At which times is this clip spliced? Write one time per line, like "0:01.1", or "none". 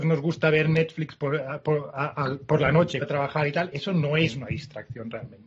0:03.0

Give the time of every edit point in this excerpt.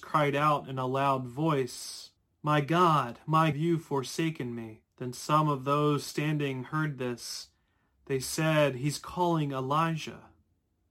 0:02.2
0:03.5
0:04.9

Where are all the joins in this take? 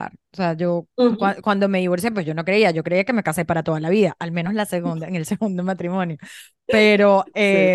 none

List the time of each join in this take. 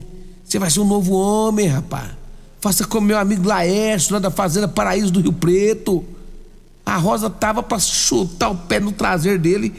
none

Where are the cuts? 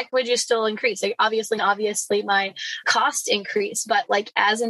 0:01.6
0:02.8

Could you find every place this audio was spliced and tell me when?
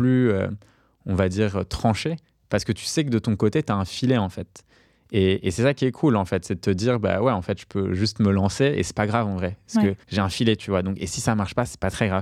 0:10.0

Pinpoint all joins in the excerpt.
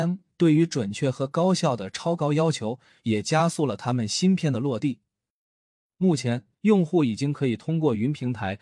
0:06.5

